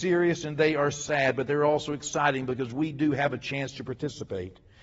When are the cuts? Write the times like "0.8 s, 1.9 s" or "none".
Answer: none